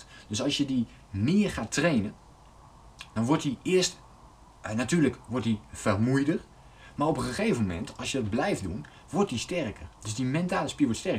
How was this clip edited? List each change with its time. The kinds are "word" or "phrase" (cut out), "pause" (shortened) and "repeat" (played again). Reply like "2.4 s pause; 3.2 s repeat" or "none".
10.0 s pause